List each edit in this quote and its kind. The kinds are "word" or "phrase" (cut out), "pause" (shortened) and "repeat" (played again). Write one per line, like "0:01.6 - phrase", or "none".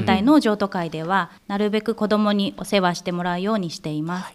0:01.4 - pause